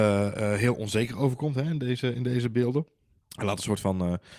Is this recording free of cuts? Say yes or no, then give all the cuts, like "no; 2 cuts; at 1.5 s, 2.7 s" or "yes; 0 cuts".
no; 1 cut; at 3.2 s